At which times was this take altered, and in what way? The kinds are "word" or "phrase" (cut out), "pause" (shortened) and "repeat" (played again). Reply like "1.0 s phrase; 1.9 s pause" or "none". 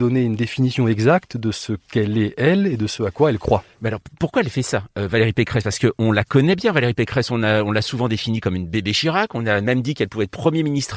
none